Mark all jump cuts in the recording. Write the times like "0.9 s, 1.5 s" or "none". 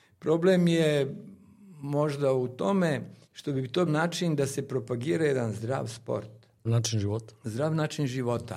3.2 s, 3.9 s, 6.7 s

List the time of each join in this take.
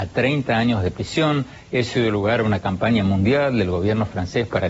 none

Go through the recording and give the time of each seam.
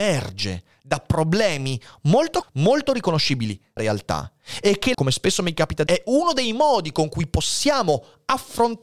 2.4 s, 3.8 s, 4.9 s, 5.9 s

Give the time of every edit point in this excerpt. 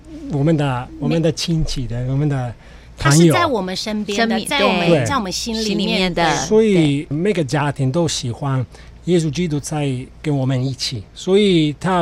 7.1 s, 11.1 s

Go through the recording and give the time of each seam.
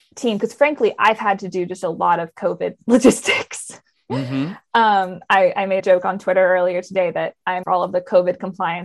5.8 s, 7.6 s

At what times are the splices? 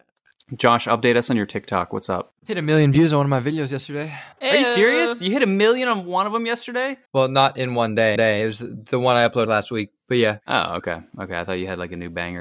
2.4 s, 4.3 s, 7.1 s, 8.2 s, 9.5 s

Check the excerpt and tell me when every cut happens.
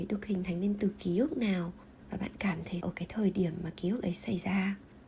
2.8 s

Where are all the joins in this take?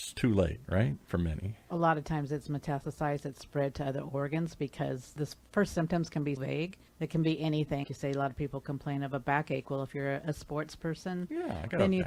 6.4 s, 6.9 s, 7.8 s

